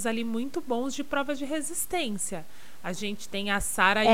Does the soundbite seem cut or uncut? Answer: uncut